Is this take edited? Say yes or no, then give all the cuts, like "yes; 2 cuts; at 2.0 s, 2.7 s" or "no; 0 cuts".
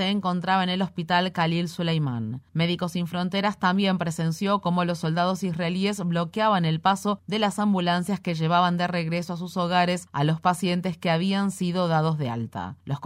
no; 0 cuts